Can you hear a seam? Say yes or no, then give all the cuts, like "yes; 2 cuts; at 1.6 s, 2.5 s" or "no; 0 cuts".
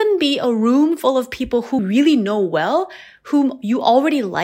yes; 1 cut; at 1.8 s